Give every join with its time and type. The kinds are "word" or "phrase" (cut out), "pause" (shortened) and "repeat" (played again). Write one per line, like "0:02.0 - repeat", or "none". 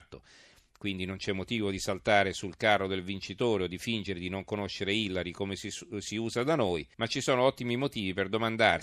0:06.9 - pause